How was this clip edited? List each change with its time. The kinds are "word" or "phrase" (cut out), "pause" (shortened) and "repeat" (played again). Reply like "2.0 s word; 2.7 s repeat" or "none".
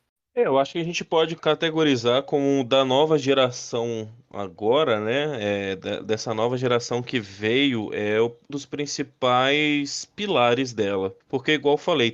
8.5 s word